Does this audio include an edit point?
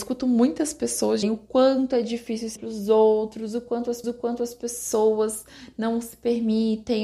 yes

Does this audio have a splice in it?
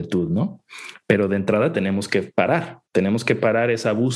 yes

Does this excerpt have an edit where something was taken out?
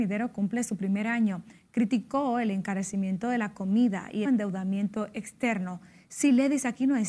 yes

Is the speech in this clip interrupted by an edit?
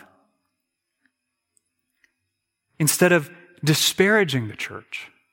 no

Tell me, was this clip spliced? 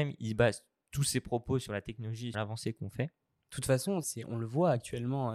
yes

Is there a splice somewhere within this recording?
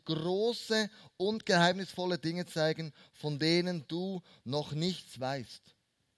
no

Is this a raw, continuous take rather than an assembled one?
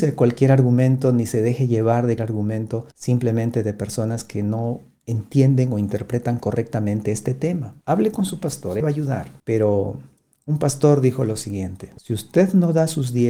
no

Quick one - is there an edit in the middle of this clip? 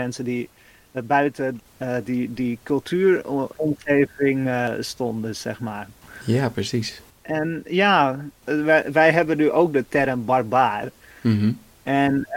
no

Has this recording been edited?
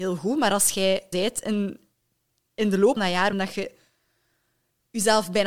yes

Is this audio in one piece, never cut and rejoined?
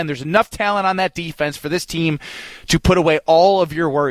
yes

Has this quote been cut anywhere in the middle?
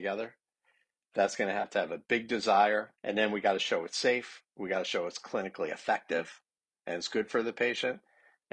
yes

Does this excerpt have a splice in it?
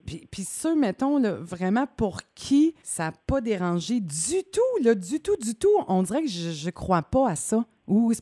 yes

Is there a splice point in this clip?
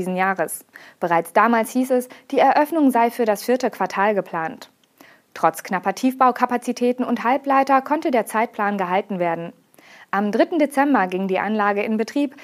no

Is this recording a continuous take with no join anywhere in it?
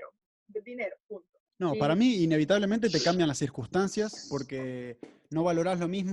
no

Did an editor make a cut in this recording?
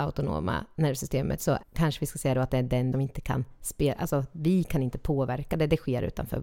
yes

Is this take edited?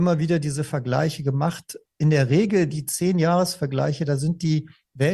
no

